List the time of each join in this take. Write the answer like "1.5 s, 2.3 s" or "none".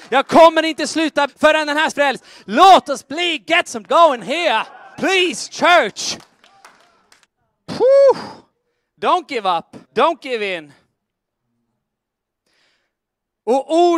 1.3 s, 1.9 s, 3.9 s, 4.2 s, 4.9 s, 7.2 s, 9.8 s

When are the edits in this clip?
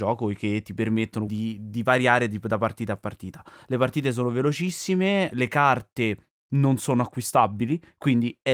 1.3 s, 5.3 s

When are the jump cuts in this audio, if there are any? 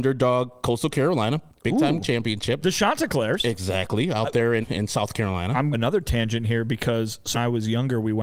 1.5 s, 4.6 s, 5.7 s, 7.3 s

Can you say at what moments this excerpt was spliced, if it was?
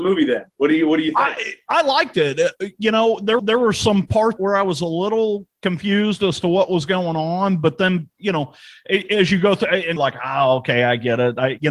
3.4 s, 4.4 s, 5.5 s, 10.0 s

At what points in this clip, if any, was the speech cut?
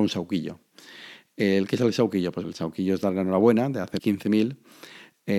2.4 s, 4.0 s

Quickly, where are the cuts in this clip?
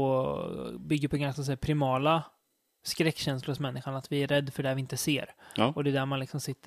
none

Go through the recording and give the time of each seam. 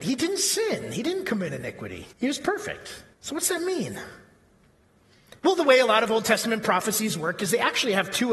2.1 s, 3.1 s, 5.4 s

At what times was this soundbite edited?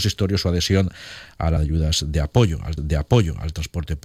1.6 s, 2.8 s

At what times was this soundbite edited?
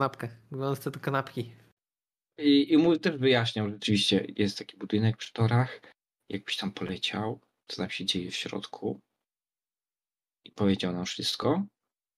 7.7 s

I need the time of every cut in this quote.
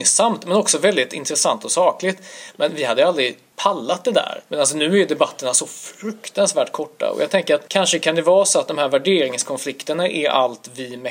4.5 s

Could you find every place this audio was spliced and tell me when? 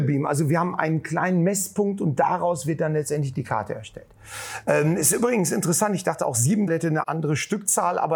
6.7 s, 7.0 s

